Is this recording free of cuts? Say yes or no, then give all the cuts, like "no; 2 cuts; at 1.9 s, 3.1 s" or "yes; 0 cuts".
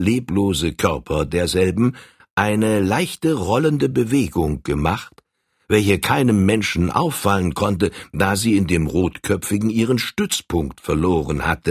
yes; 0 cuts